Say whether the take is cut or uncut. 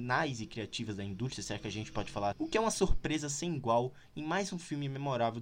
cut